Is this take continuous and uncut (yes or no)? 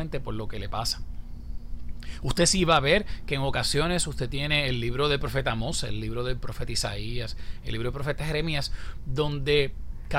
yes